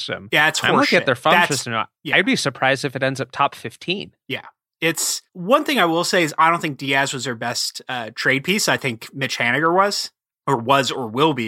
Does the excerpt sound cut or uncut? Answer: cut